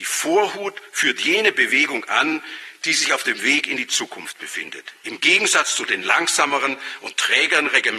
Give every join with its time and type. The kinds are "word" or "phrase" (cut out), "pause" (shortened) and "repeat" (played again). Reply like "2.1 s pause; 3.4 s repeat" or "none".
none